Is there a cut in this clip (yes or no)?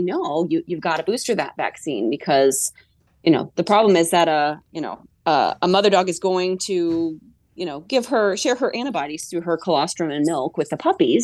no